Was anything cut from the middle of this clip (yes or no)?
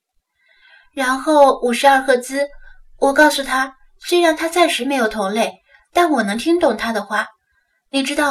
no